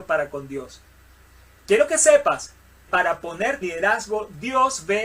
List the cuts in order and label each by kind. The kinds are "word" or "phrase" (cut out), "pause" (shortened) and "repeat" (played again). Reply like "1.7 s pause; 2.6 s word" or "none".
2.9 s word; 3.6 s word

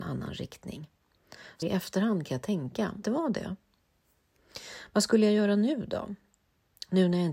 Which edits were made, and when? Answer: 1.6 s word; 3.0 s word

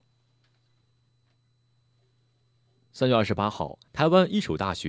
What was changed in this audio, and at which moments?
3.9 s pause

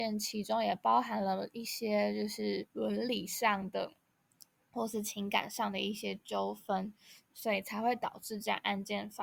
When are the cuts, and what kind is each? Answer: 2.7 s pause

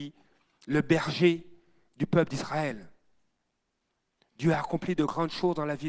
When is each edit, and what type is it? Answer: none

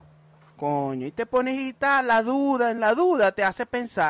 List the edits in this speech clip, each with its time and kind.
none

